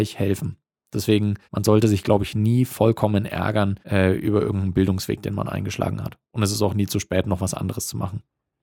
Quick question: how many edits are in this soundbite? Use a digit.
2